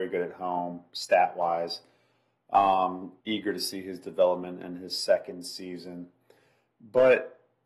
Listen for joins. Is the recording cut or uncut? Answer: cut